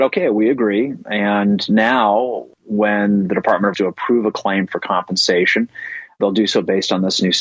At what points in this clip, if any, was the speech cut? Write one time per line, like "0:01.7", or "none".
0:03.7